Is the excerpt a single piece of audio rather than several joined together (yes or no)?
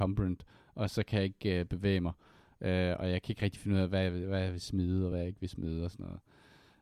yes